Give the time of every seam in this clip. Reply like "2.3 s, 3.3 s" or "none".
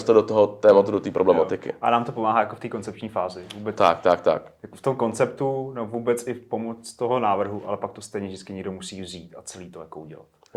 none